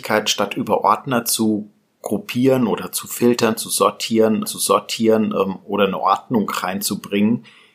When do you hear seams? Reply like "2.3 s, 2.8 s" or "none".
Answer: 4.4 s